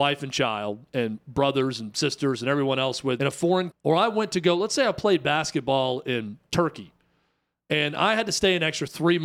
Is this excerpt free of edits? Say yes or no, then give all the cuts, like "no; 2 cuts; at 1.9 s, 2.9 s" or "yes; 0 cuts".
no; 2 cuts; at 3.2 s, 3.7 s